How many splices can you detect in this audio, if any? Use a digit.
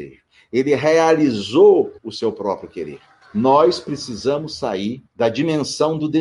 3